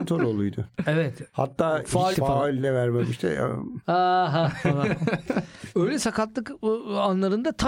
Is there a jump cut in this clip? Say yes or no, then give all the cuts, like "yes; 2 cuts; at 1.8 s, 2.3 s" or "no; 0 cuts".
yes; 1 cut; at 2.1 s